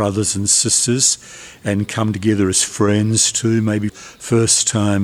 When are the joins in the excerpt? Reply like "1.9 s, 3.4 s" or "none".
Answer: 3.9 s